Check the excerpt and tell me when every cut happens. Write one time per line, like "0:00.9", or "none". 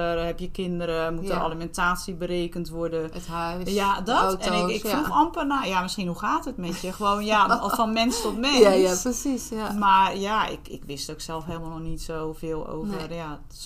none